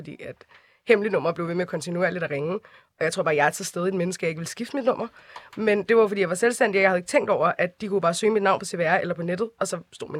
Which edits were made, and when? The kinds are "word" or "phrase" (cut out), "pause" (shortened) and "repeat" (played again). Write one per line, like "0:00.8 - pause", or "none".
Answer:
none

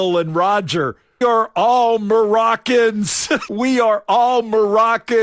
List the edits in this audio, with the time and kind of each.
0:01.2 - word
0:03.5 - word

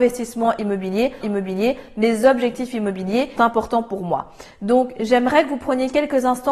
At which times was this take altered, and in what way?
0:01.2 - repeat
0:03.4 - word

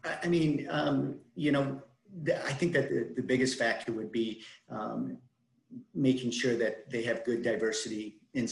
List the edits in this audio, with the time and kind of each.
0:02.9 - word

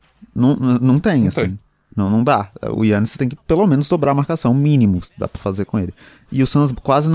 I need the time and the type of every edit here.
none

